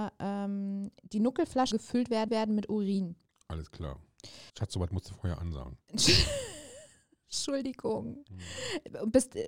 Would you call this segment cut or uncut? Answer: cut